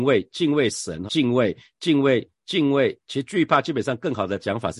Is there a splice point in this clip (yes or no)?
yes